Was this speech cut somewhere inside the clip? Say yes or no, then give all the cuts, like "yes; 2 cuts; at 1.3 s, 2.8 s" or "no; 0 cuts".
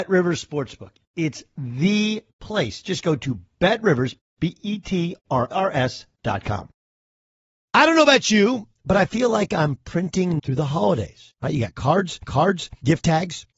yes; 4 cuts; at 5.5 s, 6.2 s, 10.4 s, 12.2 s